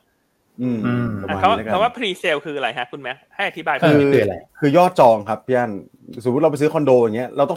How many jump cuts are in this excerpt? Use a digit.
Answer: 1